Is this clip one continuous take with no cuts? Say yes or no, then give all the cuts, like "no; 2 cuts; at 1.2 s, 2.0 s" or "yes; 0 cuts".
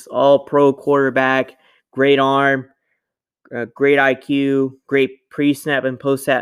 yes; 0 cuts